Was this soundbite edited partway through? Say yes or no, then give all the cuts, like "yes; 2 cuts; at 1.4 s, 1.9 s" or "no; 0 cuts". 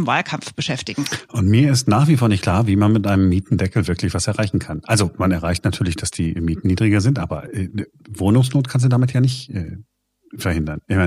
no; 0 cuts